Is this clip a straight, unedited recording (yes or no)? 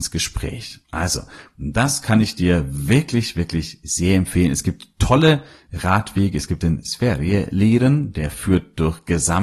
yes